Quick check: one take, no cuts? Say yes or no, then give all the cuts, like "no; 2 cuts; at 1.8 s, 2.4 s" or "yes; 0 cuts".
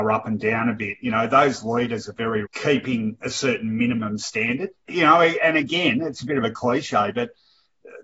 no; 2 cuts; at 2.5 s, 4.9 s